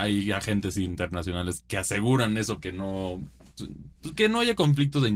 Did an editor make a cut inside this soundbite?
yes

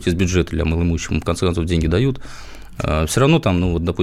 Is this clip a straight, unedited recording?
yes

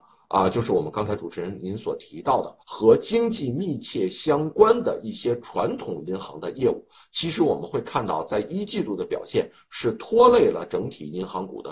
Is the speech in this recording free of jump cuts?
no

